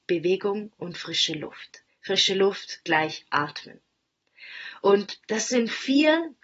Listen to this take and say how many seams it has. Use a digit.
1